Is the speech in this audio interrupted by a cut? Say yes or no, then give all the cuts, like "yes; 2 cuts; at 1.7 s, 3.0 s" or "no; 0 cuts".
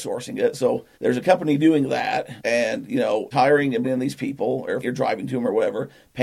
yes; 5 cuts; at 0.9 s, 2.4 s, 3.3 s, 3.8 s, 4.8 s